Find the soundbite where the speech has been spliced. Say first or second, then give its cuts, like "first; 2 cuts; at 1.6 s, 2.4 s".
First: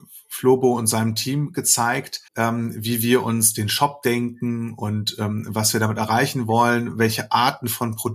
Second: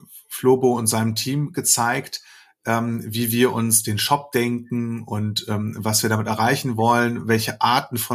first; 1 cut; at 2.3 s